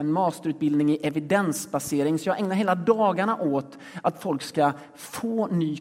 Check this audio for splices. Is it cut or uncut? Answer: uncut